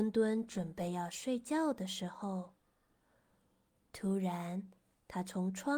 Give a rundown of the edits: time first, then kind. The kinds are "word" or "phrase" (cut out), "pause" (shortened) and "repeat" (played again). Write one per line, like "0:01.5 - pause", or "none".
none